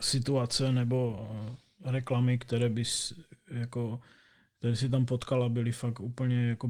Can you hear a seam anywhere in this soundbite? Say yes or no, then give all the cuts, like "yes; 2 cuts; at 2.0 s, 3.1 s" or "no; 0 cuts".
no; 0 cuts